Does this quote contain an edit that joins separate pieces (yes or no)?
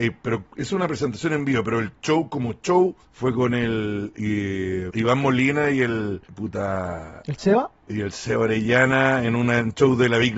yes